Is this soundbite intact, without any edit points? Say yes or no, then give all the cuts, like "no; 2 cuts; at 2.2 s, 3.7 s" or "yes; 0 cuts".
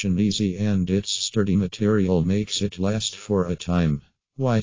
yes; 0 cuts